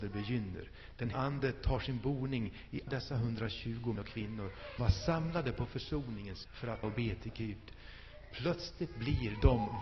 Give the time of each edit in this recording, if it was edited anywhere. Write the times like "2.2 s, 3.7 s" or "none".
1.1 s, 2.9 s, 4.0 s, 4.8 s, 6.5 s, 6.8 s